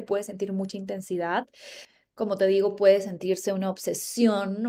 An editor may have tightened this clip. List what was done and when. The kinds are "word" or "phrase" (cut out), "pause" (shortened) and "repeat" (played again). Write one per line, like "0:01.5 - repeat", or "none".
none